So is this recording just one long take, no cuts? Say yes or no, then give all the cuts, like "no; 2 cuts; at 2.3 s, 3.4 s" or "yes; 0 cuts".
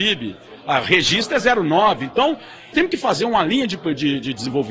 no; 1 cut; at 2.7 s